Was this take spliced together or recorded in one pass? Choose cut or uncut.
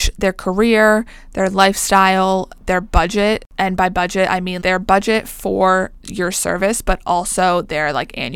cut